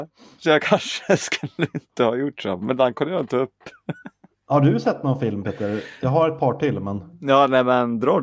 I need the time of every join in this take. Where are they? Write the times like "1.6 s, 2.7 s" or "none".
4.3 s